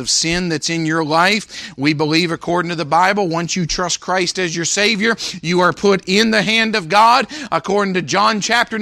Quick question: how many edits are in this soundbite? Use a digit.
0